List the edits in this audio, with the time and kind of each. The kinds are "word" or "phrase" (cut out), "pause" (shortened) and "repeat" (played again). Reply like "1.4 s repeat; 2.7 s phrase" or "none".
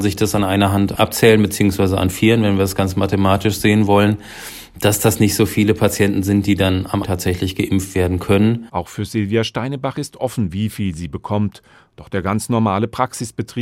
7.0 s word